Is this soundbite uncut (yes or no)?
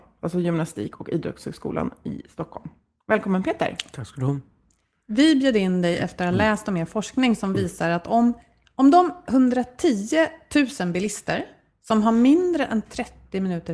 yes